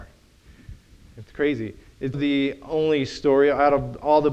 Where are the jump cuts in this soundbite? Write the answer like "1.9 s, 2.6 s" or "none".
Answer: 2.1 s